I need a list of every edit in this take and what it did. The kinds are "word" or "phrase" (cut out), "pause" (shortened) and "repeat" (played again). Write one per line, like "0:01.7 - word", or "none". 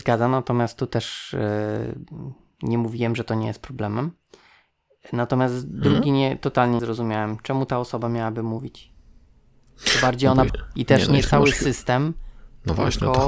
0:06.8 - word
0:10.5 - word

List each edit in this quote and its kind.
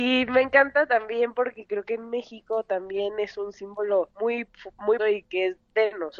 0:04.1 - pause
0:05.0 - word

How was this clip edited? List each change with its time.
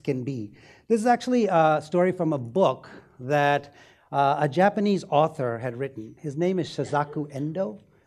none

